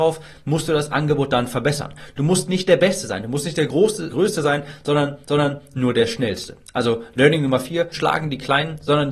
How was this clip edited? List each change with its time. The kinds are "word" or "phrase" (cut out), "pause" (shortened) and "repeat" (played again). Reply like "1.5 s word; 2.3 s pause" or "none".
4.1 s word; 5.2 s repeat; 7.9 s phrase